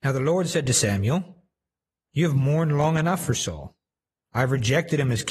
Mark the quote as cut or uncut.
uncut